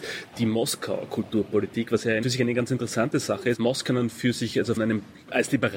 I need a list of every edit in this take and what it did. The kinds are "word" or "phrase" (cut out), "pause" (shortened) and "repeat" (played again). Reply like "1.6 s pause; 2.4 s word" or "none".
2.2 s word; 3.6 s word; 4.8 s word